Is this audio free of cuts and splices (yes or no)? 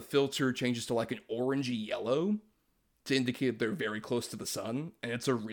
yes